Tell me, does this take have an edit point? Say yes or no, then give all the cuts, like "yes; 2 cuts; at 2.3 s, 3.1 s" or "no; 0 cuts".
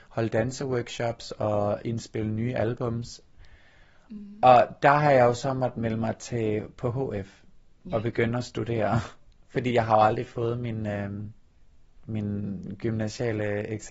no; 0 cuts